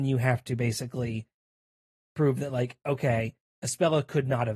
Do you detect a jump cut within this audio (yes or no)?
no